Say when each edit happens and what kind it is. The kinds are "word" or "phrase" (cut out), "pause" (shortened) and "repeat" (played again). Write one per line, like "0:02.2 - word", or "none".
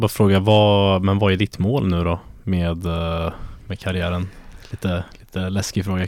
none